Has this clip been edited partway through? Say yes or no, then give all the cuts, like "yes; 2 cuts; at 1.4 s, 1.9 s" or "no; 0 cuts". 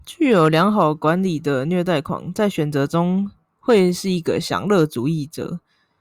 no; 0 cuts